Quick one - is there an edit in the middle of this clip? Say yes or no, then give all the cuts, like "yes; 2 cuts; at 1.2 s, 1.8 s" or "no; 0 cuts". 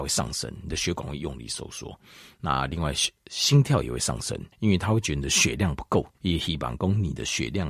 yes; 2 cuts; at 4.5 s, 6.1 s